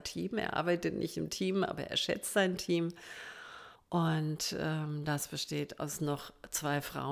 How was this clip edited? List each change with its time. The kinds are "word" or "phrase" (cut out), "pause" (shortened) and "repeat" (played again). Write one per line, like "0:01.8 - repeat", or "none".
0:03.7 - pause